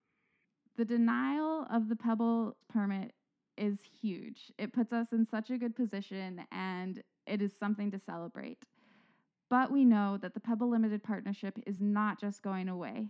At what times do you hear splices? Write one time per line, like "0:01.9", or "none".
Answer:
none